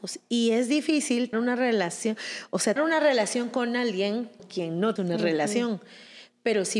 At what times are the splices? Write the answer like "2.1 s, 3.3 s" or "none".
1.3 s, 2.8 s, 4.4 s, 5.0 s

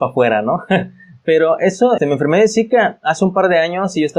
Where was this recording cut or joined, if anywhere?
2.0 s

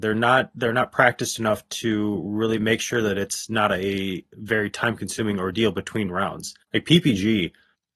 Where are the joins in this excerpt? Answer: 6.6 s

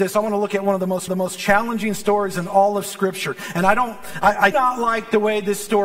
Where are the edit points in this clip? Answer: 1.1 s, 4.5 s

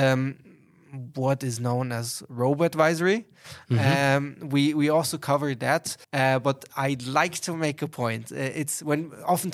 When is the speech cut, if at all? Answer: 6.0 s

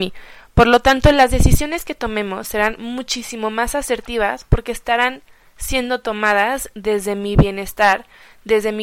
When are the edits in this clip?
none

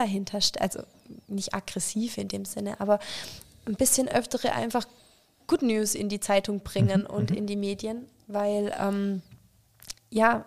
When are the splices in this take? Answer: none

